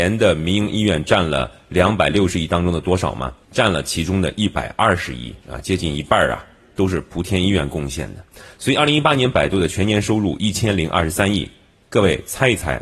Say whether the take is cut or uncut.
cut